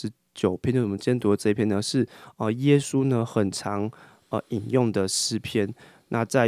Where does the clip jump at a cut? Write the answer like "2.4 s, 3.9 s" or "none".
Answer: none